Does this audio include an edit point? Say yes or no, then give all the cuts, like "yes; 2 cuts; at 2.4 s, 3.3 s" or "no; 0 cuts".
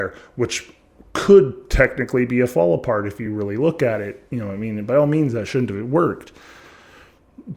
no; 0 cuts